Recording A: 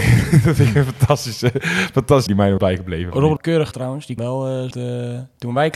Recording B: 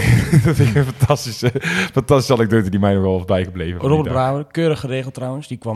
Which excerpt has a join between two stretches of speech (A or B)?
A